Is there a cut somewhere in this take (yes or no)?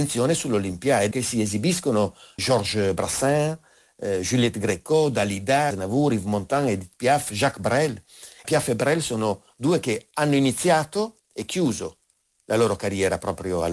yes